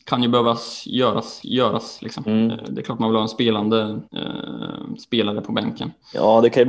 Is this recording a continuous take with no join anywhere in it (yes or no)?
no